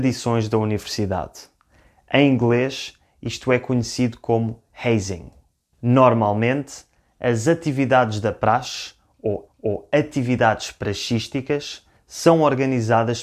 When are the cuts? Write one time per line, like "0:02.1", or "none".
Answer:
0:09.5